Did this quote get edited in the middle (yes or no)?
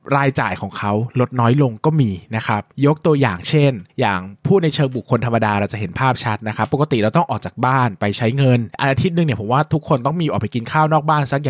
yes